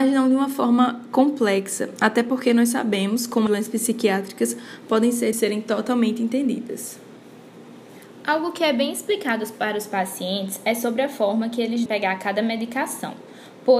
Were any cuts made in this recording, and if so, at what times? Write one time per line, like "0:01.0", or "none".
0:03.5
0:05.3
0:11.9